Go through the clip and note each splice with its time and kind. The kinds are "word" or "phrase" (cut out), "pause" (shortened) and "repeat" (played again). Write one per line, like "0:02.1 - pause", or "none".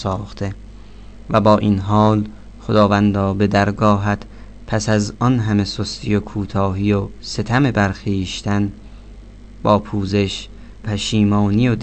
0:10.8 - word